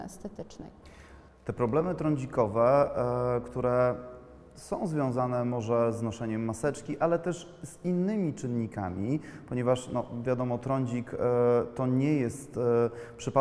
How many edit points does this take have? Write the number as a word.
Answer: zero